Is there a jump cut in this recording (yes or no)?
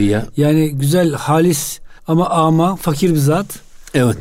yes